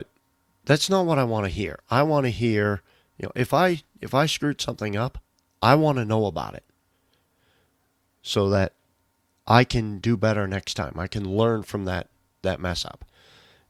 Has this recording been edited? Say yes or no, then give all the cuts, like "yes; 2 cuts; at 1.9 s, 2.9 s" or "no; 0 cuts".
no; 0 cuts